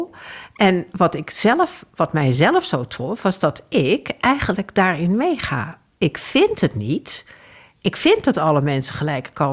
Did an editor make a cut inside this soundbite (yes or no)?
no